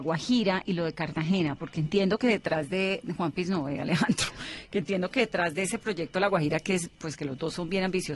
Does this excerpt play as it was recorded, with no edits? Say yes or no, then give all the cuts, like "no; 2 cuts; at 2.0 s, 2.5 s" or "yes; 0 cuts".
yes; 0 cuts